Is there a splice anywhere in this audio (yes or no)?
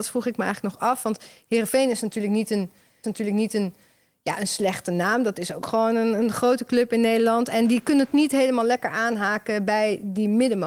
yes